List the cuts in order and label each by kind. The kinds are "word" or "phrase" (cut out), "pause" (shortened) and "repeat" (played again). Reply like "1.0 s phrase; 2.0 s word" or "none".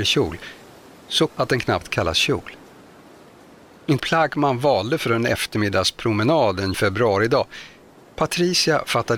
1.3 s word; 1.8 s word; 4.0 s word; 6.7 s word